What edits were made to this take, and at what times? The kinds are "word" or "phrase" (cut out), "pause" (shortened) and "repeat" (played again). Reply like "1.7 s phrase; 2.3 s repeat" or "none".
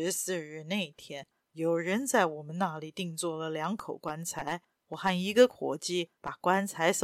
none